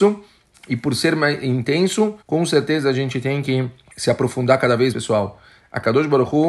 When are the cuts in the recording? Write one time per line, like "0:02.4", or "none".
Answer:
0:02.2
0:03.9
0:04.9